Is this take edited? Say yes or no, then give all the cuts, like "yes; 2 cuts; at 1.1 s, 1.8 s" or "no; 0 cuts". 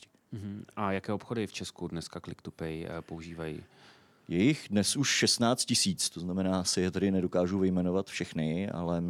no; 0 cuts